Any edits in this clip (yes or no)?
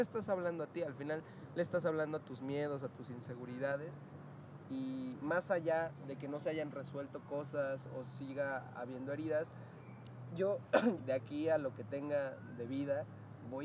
yes